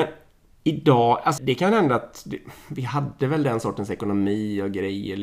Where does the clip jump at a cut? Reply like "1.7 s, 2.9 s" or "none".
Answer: 1.4 s